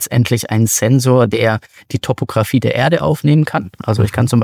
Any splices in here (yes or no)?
no